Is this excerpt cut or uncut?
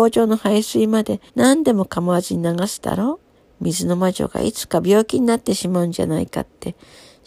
cut